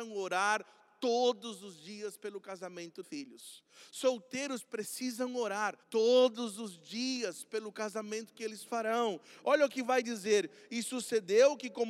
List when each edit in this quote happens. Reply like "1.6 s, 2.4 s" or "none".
3.0 s, 5.8 s

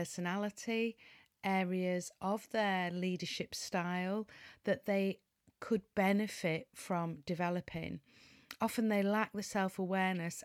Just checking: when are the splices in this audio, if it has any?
none

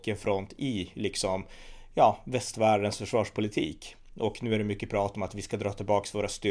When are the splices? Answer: none

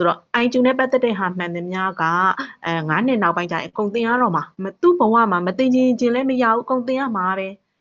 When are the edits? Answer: 4.5 s

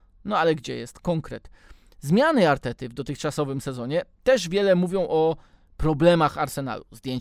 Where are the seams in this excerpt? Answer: none

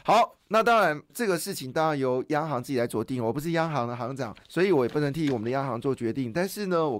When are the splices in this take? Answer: 1.1 s, 4.4 s

